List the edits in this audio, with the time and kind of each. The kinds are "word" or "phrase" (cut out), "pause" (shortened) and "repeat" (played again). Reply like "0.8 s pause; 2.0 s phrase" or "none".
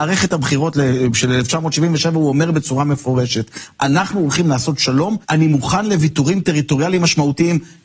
5.2 s pause